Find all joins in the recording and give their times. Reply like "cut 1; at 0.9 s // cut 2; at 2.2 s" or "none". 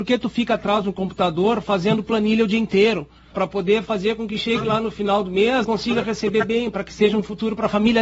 cut 1; at 3.3 s // cut 2; at 5.6 s